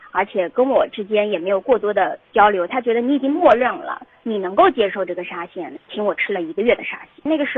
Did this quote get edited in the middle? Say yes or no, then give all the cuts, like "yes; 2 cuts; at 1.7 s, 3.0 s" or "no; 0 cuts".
yes; 1 cut; at 2.2 s